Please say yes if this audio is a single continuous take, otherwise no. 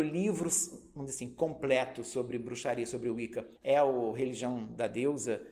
no